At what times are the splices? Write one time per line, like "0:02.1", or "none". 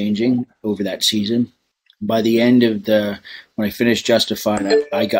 0:01.7

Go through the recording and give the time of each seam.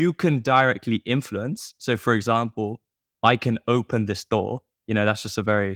none

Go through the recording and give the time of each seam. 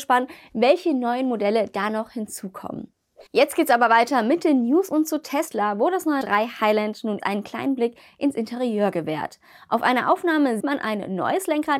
0:03.3
0:06.2
0:07.2
0:10.6

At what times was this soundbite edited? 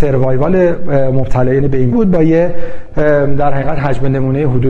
0:01.9

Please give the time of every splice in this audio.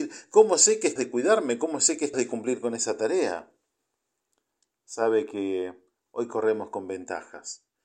0:01.0
0:02.1

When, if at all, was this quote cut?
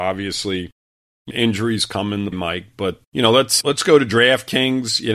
0:01.3
0:02.3
0:03.0
0:03.6

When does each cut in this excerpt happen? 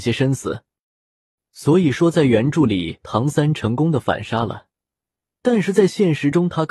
none

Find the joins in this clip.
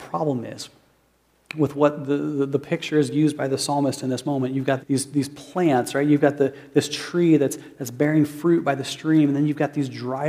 0:04.8

